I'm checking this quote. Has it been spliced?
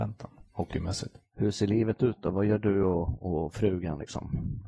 no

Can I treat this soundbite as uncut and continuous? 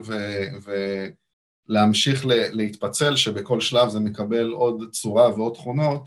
yes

